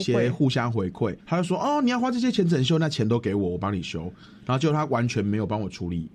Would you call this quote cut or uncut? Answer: cut